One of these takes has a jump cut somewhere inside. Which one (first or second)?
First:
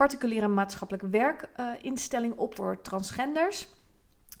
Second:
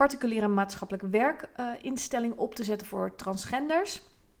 first